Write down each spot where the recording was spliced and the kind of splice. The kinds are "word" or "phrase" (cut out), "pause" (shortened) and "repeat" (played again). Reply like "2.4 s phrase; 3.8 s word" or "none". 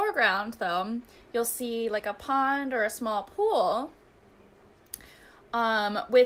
none